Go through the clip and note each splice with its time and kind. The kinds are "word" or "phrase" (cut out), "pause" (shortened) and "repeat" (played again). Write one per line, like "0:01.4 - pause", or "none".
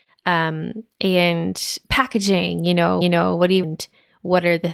0:01.8 - pause
0:03.0 - repeat
0:03.6 - phrase